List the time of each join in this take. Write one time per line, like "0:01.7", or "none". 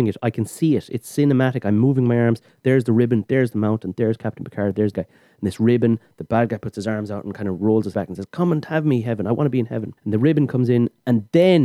0:04.9
0:07.9
0:10.0